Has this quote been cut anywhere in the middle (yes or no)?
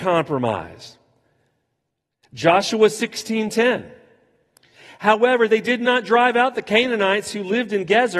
no